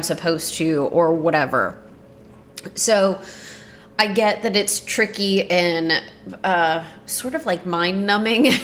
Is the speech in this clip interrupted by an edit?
no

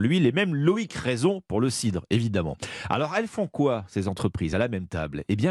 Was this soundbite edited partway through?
no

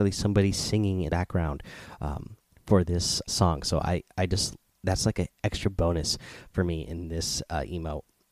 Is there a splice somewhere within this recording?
yes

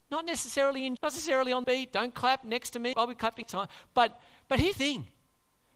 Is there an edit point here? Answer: yes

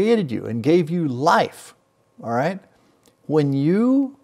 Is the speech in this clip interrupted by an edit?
no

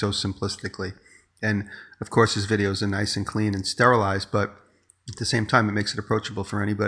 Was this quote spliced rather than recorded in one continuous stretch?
no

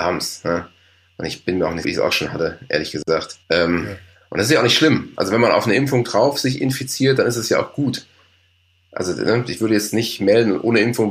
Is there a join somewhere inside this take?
yes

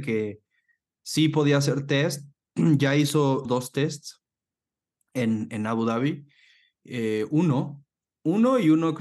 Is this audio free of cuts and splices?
no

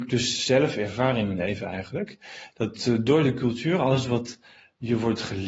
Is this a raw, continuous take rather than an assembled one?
yes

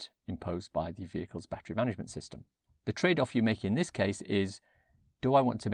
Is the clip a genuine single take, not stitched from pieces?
yes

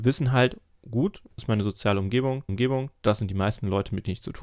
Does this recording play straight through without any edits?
no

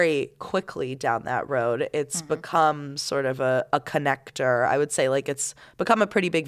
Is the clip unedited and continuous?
yes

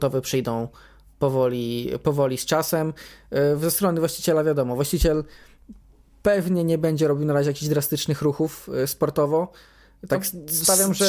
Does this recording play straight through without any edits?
yes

